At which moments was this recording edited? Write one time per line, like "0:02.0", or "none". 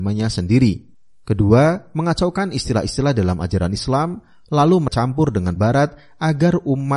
0:04.9
0:05.6